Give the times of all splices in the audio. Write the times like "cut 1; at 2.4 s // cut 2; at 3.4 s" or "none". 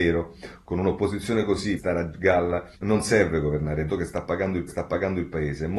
cut 1; at 1.8 s // cut 2; at 2.8 s // cut 3; at 3.9 s // cut 4; at 4.7 s